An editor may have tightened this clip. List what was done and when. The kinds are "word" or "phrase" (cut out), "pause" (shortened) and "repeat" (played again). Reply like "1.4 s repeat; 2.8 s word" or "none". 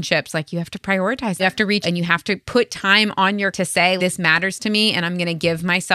1.4 s phrase; 1.8 s word; 3.5 s word; 4.0 s word

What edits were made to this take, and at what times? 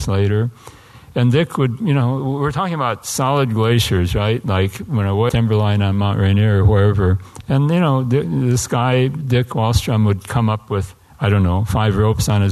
5.3 s word

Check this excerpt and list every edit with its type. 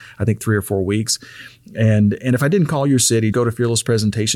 3.3 s word

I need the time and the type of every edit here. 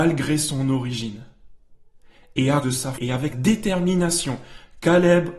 2.6 s word; 2.9 s word; 3.3 s word

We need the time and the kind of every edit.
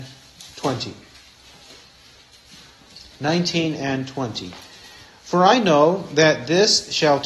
none

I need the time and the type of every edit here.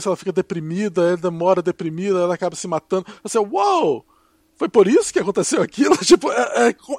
none

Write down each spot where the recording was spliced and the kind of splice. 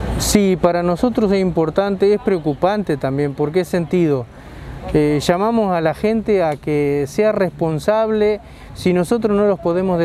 none

